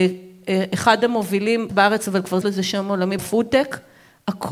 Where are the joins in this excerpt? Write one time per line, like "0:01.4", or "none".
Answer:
0:01.7
0:02.4
0:03.2